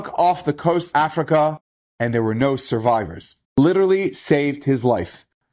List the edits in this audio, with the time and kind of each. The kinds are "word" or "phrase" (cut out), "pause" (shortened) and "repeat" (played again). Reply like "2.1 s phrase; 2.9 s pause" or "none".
0.9 s word; 3.4 s pause